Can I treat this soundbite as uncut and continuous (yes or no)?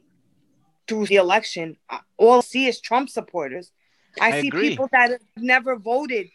no